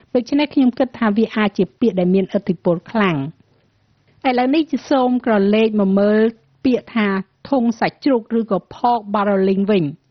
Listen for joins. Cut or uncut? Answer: uncut